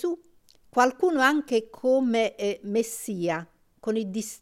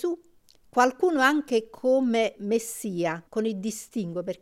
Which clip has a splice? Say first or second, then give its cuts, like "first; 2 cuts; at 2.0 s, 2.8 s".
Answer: second; 2 cuts; at 2.4 s, 3.3 s